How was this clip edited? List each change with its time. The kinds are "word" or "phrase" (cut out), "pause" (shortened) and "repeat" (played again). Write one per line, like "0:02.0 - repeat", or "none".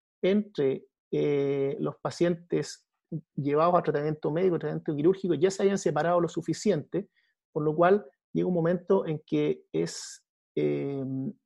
none